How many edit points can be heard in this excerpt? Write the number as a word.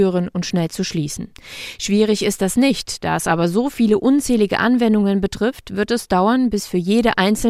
zero